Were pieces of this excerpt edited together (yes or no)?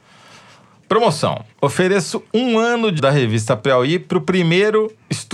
yes